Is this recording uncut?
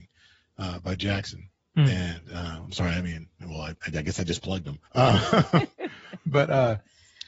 no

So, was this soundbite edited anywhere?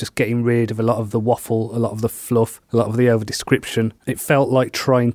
no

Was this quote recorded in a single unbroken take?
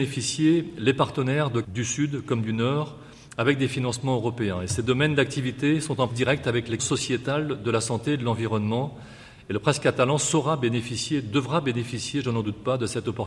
no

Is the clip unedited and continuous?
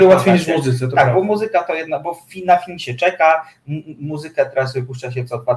yes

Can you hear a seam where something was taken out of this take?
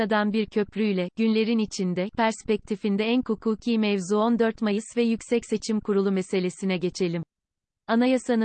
yes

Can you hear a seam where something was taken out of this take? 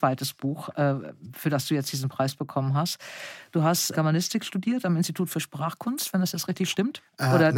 yes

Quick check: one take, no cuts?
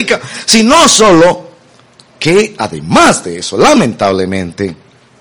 yes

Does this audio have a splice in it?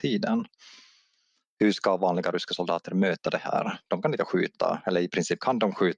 no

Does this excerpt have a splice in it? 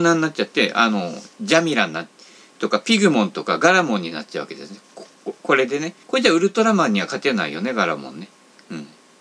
yes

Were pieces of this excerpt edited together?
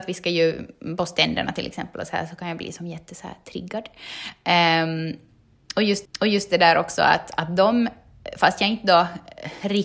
yes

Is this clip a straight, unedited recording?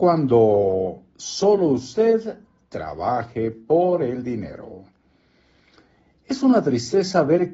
yes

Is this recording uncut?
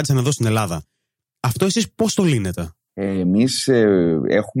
yes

